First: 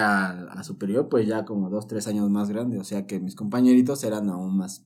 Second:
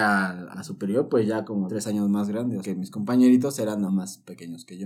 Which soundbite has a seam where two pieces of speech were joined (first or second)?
second